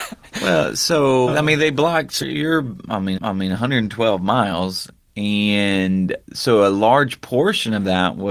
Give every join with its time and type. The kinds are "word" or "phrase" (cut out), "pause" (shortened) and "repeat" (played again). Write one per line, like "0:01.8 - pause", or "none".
0:01.3 - word
0:02.2 - word
0:03.1 - repeat
0:06.2 - pause

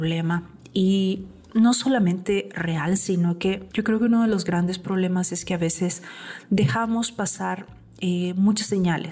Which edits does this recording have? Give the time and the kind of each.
0:03.7 - pause

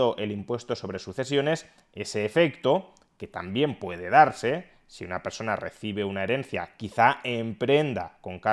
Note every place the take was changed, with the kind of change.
none

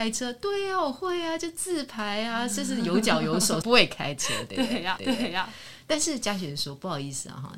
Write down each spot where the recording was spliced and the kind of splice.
0:03.6 - word
0:05.0 - repeat

